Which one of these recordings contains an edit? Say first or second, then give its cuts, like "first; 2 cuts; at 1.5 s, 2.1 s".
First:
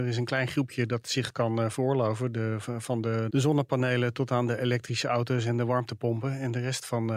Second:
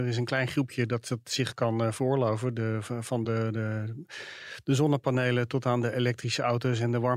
first; 2 cuts; at 1.0 s, 3.3 s